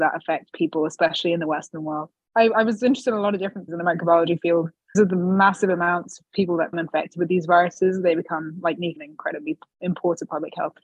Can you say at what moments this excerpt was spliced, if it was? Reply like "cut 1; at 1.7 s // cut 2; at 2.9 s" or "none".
cut 1; at 3.7 s // cut 2; at 4.9 s // cut 3; at 6.7 s // cut 4; at 9.0 s